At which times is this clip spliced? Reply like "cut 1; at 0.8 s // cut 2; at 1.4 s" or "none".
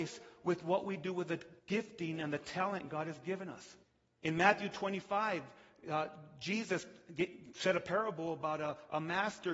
cut 1; at 1.6 s // cut 2; at 3.8 s